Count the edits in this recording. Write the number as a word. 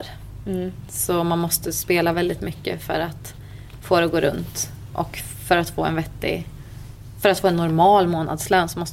zero